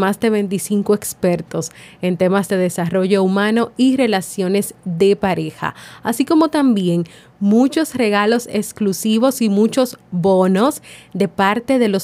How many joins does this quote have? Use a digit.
0